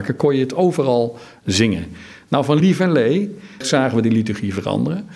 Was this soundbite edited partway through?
no; 0 cuts

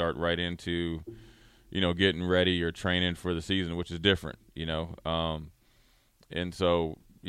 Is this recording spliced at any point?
no; 0 cuts

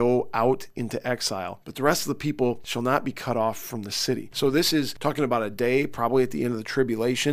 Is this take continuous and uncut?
yes; 0 cuts

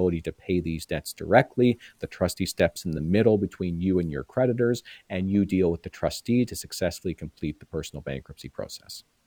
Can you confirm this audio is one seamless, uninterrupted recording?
yes; 0 cuts

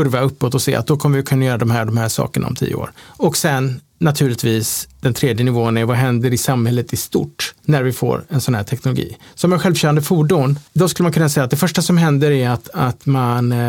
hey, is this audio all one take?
no; 3 cuts; at 3.0 s, 7.6 s, 10.7 s

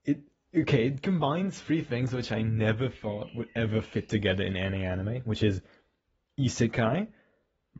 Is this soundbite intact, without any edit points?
yes; 0 cuts

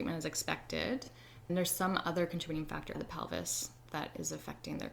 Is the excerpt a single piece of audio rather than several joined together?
no; 3 cuts; at 1.5 s, 2.9 s, 3.8 s

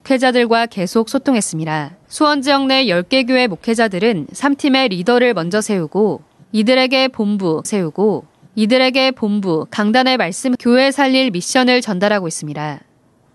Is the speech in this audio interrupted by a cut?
yes; 3 cuts; at 2.0 s, 7.6 s, 10.5 s

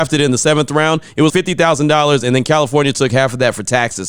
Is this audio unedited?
no; 1 cut; at 1.3 s

